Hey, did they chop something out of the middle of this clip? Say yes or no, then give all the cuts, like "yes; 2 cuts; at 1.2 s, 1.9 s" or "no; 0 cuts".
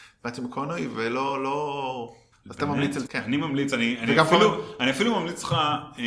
yes; 2 cuts; at 2.3 s, 3.1 s